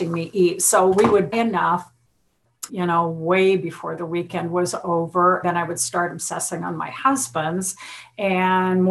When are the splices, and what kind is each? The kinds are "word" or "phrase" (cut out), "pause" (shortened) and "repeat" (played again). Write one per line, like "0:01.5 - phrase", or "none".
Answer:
0:01.3 - word
0:02.7 - phrase
0:05.4 - word